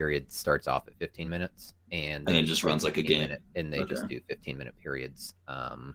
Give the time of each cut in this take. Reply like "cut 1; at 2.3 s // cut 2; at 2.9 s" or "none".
none